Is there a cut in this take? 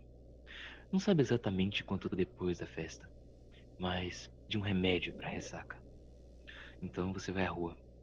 yes; 2 cuts; at 2.1 s, 4.5 s

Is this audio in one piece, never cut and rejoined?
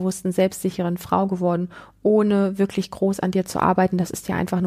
yes; 0 cuts

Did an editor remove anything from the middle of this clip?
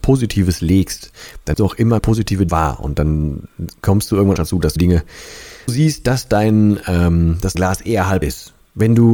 yes; 8 cuts; at 1.5 s, 2.0 s, 2.5 s, 4.4 s, 4.8 s, 5.7 s, 7.5 s, 8.2 s

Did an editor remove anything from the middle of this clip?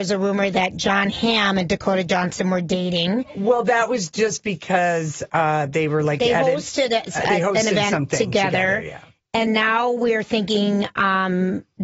yes; 1 cut; at 9.5 s

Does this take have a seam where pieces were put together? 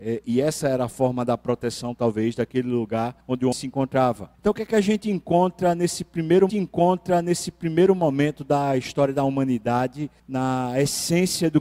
yes; 5 cuts; at 3.2 s, 3.5 s, 4.3 s, 6.5 s, 10.2 s

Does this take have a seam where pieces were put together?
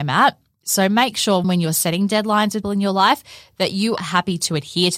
yes; 3 cuts; at 1.4 s, 2.6 s, 4.0 s

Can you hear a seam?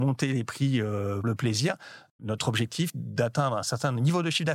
yes; 2 cuts; at 1.2 s, 2.9 s

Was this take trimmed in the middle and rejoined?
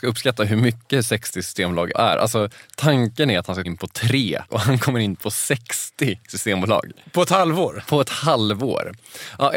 yes; 3 cuts; at 1.9 s, 3.6 s, 4.5 s

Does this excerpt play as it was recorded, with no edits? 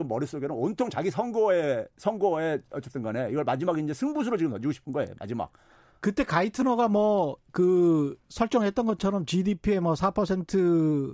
yes; 0 cuts

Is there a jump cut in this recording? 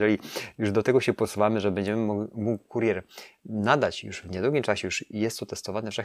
no; 0 cuts

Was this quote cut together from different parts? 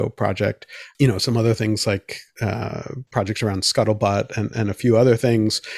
no; 0 cuts

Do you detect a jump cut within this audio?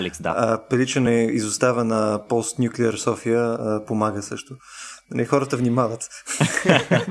no; 0 cuts

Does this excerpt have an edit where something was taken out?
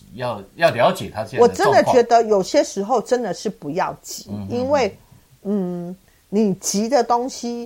no; 0 cuts

